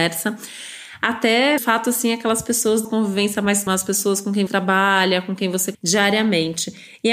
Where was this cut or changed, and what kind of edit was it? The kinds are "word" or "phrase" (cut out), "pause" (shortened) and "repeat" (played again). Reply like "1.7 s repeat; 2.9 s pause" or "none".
1.6 s word; 2.8 s word; 3.7 s word; 4.5 s word; 5.7 s word